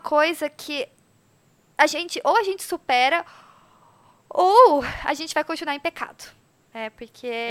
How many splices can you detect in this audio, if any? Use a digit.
0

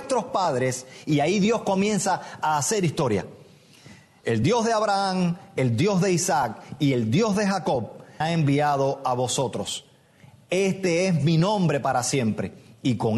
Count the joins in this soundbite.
1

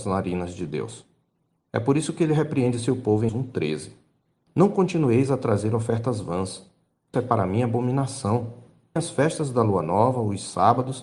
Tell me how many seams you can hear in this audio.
3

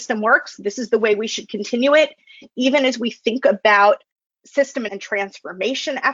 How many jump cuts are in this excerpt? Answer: 1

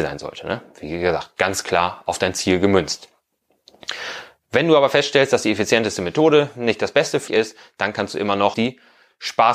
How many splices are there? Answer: 2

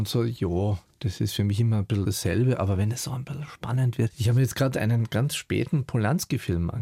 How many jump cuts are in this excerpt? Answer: 0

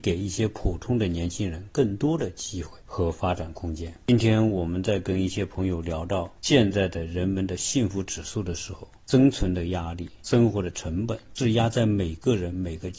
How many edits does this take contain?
1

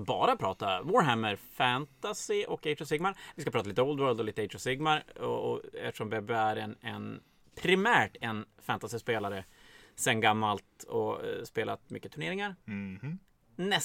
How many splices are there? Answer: 0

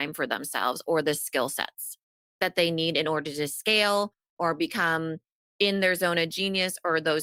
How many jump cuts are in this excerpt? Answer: 0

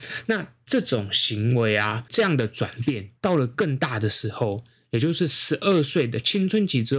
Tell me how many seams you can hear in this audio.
1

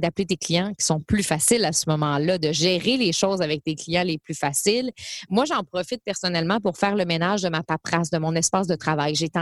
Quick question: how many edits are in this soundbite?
0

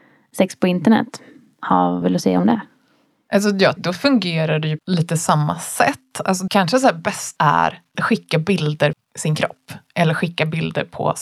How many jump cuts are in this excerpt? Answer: 7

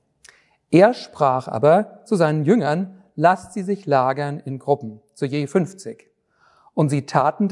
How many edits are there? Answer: 0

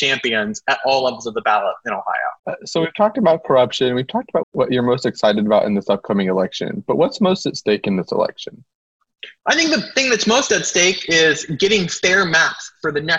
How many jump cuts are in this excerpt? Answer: 3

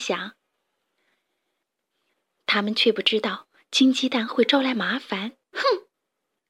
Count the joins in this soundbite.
1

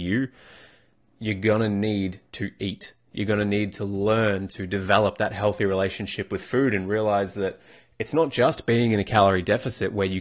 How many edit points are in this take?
0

